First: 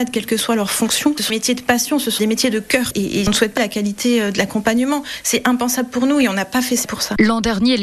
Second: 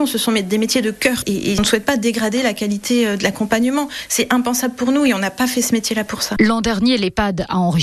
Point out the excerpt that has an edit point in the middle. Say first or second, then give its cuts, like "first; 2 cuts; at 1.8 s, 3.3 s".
first; 4 cuts; at 1.3 s, 2.2 s, 3.6 s, 6.8 s